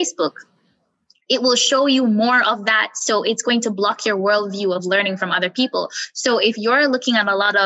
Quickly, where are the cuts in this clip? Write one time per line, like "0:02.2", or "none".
none